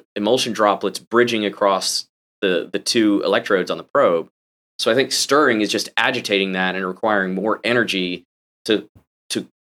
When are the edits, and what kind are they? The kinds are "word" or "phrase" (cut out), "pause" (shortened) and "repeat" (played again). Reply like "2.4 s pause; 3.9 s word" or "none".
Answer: none